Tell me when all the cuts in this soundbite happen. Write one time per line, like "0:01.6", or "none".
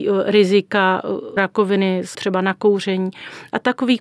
0:01.4
0:02.1